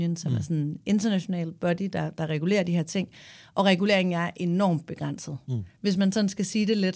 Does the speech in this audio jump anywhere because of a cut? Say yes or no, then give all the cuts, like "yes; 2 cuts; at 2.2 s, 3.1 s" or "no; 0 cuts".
no; 0 cuts